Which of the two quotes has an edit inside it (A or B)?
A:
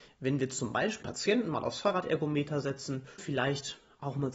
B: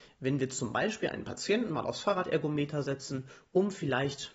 A